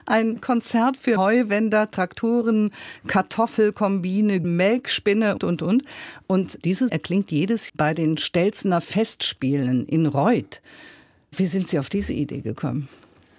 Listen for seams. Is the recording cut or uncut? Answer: cut